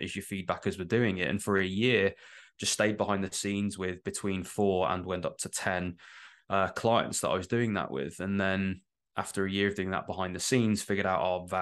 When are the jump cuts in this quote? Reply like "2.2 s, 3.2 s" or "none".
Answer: none